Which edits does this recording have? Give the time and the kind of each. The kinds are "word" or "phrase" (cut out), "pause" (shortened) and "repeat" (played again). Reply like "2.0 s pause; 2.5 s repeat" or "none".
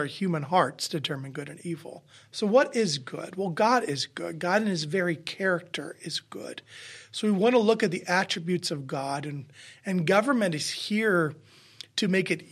2.1 s pause